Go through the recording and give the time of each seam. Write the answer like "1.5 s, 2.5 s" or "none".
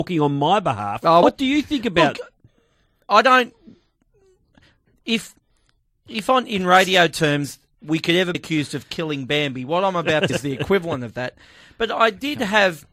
1.2 s, 8.3 s, 10.3 s

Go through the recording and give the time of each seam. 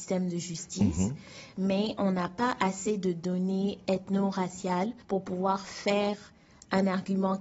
5.0 s

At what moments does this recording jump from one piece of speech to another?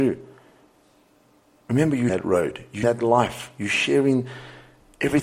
2.1 s, 2.8 s

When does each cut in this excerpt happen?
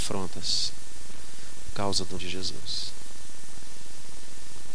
1.7 s, 2.2 s

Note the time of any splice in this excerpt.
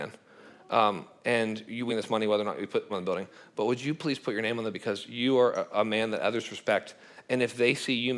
1.9 s, 2.9 s, 4.7 s

